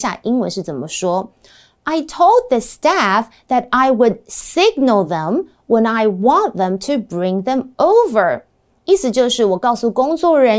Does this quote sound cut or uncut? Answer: uncut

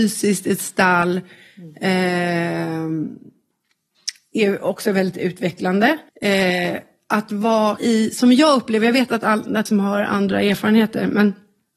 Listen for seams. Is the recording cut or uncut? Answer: cut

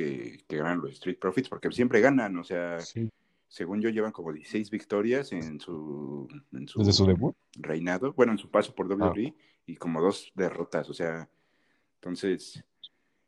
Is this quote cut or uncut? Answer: uncut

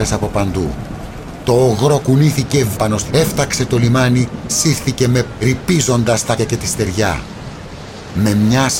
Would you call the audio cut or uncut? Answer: cut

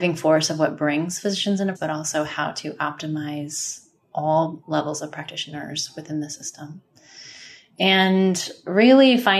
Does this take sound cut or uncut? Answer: cut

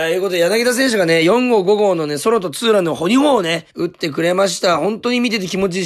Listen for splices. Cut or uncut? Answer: cut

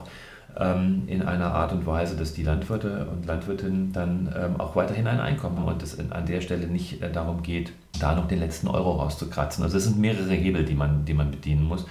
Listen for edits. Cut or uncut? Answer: cut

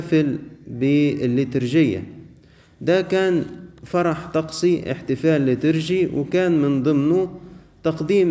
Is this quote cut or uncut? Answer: uncut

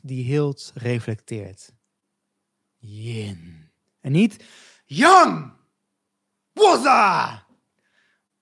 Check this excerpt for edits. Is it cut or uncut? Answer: uncut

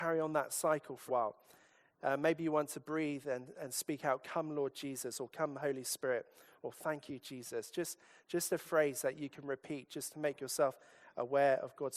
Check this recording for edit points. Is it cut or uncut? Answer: cut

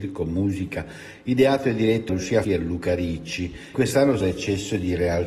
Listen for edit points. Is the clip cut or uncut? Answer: cut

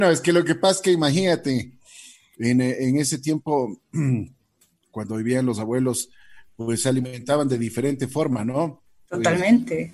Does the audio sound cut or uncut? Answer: uncut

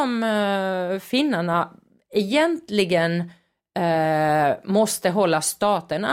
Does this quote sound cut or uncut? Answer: uncut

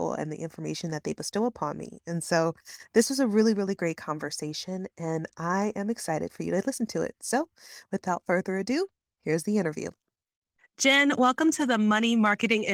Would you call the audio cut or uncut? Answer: uncut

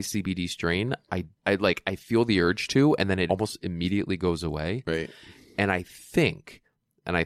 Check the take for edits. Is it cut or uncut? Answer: cut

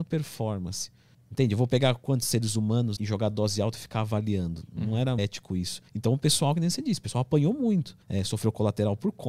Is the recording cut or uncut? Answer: cut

